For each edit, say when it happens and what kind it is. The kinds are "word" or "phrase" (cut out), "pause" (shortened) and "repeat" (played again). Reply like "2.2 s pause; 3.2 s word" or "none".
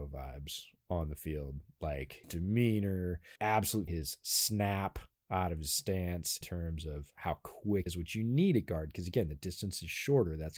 2.2 s word; 3.4 s word; 3.9 s word; 6.4 s word; 7.9 s word